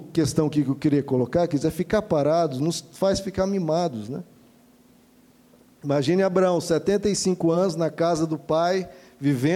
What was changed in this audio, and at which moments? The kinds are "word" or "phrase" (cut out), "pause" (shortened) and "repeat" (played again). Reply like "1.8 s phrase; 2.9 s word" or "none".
none